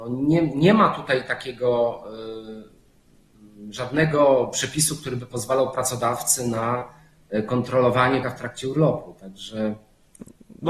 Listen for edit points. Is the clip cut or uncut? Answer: cut